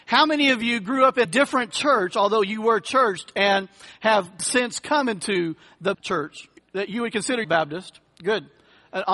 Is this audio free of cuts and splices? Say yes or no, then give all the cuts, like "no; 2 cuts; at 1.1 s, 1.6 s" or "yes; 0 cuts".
no; 5 cuts; at 1.2 s, 4.4 s, 5.9 s, 6.6 s, 7.4 s